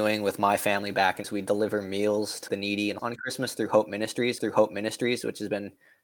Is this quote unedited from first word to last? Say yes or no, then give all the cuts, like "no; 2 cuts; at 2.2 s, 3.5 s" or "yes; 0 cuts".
no; 4 cuts; at 1.2 s, 2.5 s, 3.0 s, 4.4 s